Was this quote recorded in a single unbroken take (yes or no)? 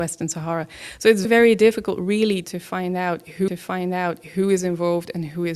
no